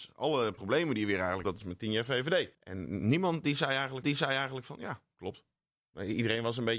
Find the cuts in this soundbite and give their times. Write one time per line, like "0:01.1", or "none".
0:01.4
0:02.5
0:04.0